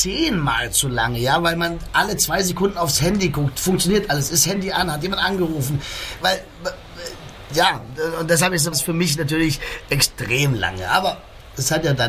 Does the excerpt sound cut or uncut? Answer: cut